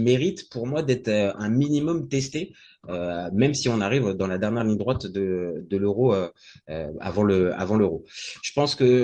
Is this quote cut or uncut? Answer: uncut